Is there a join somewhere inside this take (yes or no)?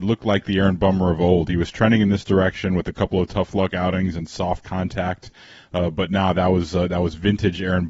no